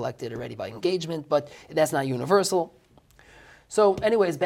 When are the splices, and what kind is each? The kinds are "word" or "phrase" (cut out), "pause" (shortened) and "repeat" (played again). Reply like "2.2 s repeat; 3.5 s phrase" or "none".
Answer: none